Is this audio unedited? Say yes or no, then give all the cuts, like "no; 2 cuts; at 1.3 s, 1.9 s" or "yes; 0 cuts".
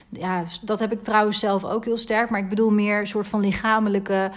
yes; 0 cuts